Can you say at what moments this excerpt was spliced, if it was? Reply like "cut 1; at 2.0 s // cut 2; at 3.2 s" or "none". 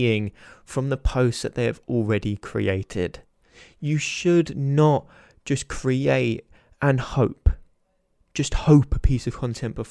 none